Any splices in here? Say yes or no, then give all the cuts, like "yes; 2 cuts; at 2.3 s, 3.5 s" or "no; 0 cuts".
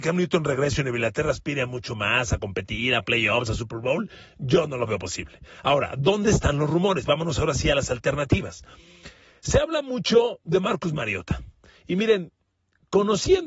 no; 0 cuts